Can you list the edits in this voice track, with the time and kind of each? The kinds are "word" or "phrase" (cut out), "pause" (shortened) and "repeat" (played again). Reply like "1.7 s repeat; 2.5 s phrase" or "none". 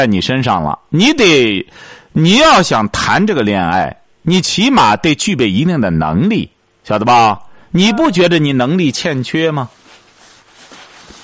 none